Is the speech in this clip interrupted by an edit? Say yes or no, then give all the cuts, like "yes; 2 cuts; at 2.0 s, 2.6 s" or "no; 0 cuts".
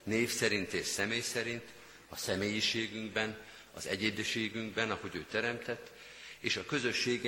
no; 0 cuts